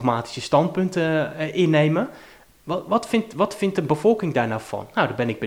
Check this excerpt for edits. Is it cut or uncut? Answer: uncut